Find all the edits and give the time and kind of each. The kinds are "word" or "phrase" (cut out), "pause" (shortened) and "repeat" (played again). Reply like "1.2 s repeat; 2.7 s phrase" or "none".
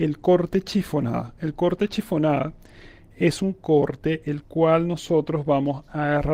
none